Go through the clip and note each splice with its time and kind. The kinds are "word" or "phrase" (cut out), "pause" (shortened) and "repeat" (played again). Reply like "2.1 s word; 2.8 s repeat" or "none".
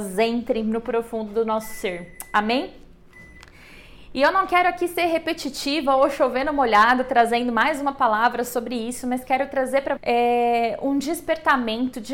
10.0 s word